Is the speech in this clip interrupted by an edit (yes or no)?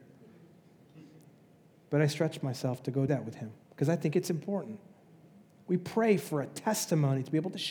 yes